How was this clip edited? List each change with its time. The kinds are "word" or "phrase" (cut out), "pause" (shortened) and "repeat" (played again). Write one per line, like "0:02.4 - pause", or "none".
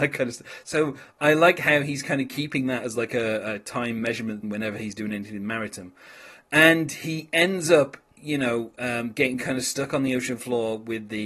0:04.4 - word